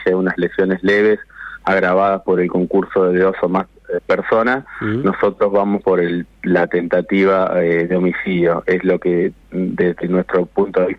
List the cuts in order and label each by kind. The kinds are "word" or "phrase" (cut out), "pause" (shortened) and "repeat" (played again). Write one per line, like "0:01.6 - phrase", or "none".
none